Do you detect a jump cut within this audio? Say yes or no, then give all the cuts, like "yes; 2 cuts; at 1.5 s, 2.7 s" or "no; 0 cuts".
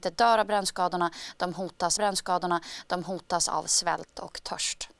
yes; 1 cut; at 2.0 s